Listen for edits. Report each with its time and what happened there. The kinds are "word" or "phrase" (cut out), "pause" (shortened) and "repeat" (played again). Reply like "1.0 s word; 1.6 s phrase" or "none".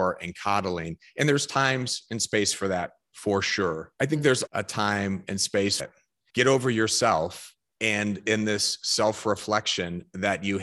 3.9 s pause; 4.5 s word; 5.8 s phrase